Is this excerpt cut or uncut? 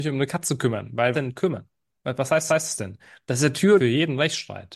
cut